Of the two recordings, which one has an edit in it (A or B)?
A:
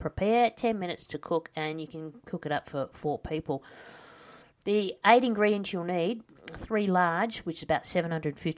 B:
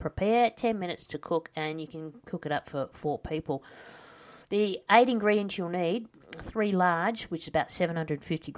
B